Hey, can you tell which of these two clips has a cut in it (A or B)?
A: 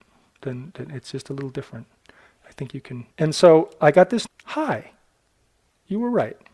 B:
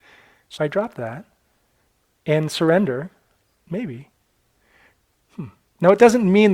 A